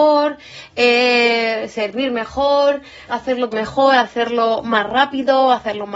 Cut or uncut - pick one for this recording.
cut